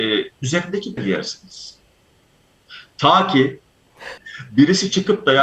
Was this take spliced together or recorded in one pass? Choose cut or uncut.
cut